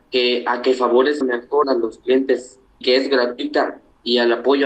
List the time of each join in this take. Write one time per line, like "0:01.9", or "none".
0:01.2
0:01.6
0:02.8